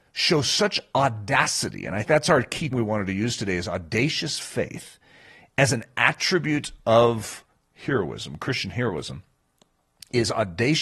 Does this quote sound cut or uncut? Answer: cut